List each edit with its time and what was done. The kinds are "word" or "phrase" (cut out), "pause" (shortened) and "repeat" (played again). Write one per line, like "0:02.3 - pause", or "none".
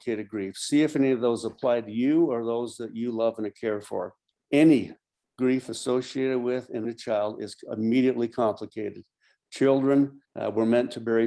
0:06.8 - word
0:10.2 - pause

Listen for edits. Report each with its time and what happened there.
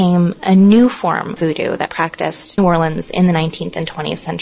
0:01.4 - word
0:01.9 - word
0:02.6 - word

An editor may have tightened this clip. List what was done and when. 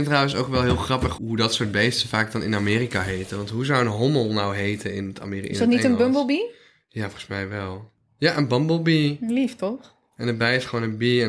0:01.2 - word

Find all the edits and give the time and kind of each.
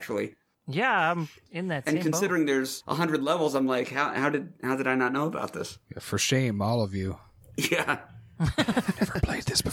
none

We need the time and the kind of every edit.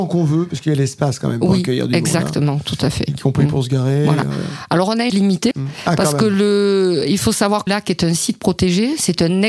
0:05.1 - word
0:05.5 - word
0:07.7 - word

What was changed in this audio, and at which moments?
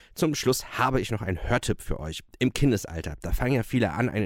none

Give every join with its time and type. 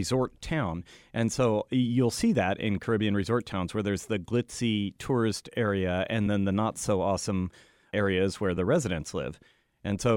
none

